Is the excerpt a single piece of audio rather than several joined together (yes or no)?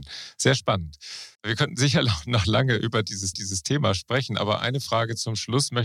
no